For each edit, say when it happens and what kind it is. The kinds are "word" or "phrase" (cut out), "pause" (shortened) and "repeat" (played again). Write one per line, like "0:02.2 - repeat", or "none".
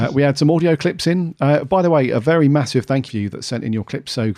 0:03.1 - phrase